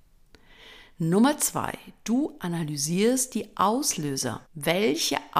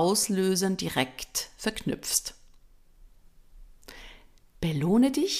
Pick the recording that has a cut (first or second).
first